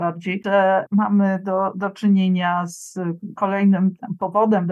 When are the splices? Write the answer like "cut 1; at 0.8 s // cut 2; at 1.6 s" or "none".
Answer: none